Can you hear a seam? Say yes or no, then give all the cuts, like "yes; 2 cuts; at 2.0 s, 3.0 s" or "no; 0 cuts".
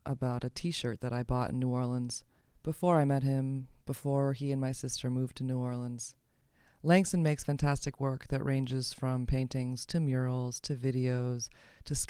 no; 0 cuts